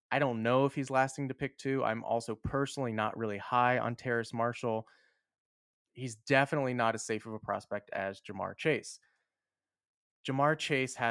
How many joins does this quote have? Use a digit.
0